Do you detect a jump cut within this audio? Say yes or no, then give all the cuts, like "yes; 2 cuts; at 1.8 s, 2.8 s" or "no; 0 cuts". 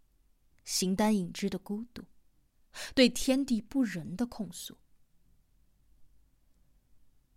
no; 0 cuts